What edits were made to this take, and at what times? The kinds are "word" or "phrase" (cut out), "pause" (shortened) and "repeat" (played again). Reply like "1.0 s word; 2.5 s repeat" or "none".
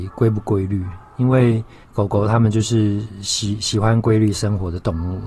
1.8 s pause